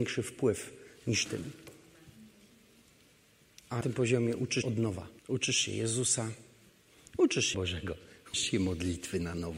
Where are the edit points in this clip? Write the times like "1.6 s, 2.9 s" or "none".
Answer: 1.3 s, 3.8 s, 4.6 s, 5.2 s, 7.5 s, 8.3 s

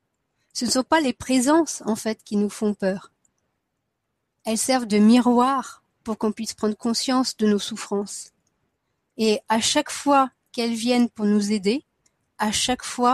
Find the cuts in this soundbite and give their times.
none

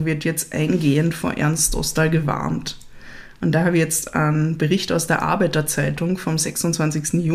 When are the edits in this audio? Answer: none

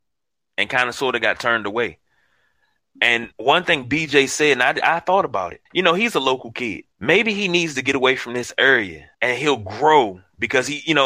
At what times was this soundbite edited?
3.3 s, 5.7 s, 6.9 s, 9.1 s

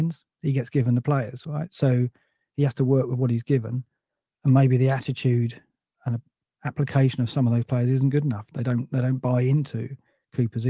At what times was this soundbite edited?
none

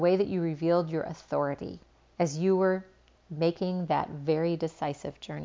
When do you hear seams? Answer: 1.9 s

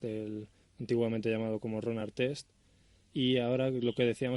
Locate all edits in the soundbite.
none

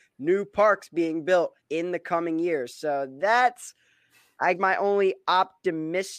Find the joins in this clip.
1.6 s, 4.5 s

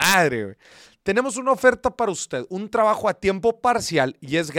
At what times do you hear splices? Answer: none

